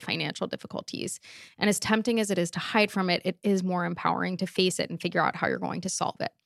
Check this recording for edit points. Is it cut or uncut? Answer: uncut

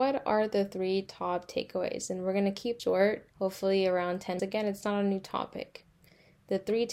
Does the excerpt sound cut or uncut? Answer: cut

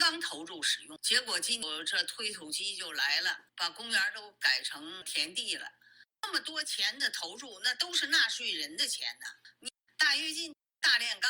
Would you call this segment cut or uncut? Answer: uncut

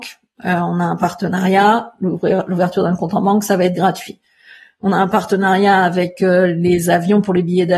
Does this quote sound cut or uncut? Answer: uncut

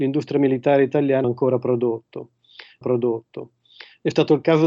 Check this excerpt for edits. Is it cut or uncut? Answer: cut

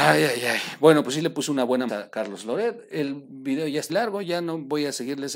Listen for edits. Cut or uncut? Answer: cut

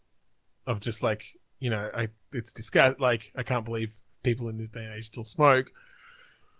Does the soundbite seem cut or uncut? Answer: uncut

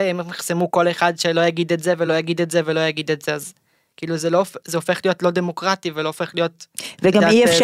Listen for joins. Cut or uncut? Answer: uncut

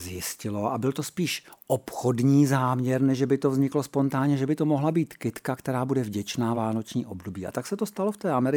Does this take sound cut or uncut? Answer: cut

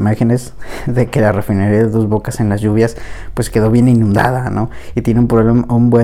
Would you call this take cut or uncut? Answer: uncut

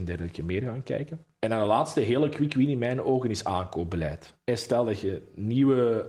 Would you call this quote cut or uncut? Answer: uncut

